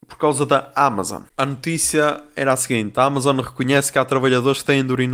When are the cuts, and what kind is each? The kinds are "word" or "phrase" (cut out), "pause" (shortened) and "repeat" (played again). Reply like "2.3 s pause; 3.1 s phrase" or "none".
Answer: 1.3 s pause